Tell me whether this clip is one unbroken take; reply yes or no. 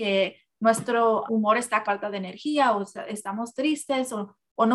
no